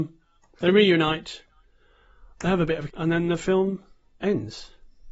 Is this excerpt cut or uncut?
cut